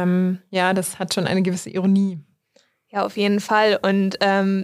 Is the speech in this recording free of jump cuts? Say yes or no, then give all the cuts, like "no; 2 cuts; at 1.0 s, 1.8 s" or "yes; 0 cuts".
yes; 0 cuts